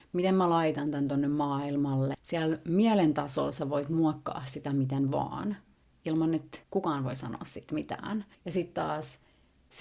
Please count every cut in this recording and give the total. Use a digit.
2